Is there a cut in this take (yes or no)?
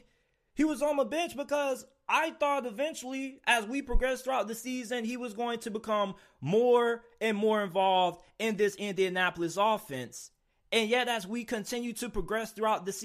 no